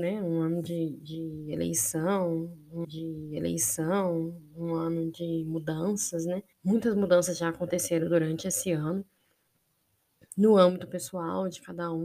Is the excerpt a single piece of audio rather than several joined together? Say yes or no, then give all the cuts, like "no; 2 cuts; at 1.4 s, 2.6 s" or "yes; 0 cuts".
no; 2 cuts; at 2.8 s, 6.5 s